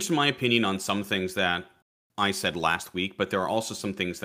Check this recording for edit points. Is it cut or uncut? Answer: uncut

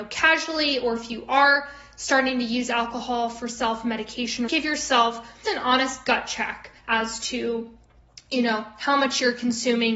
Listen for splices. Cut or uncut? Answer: cut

